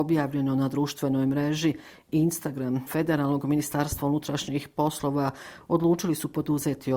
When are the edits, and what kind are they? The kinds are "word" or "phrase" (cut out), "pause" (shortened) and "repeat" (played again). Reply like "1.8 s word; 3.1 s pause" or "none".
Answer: 2.9 s word